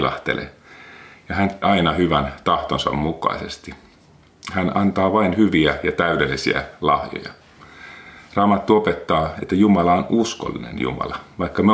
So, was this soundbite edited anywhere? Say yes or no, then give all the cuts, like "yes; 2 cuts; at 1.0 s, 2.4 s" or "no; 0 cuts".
yes; 1 cut; at 1.6 s